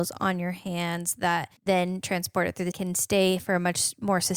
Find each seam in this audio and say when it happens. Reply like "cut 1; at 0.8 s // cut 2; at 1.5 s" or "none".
cut 1; at 1.6 s // cut 2; at 2.7 s